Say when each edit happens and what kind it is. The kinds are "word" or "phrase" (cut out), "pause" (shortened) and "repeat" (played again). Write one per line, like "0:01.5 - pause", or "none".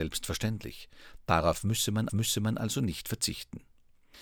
0:02.1 - repeat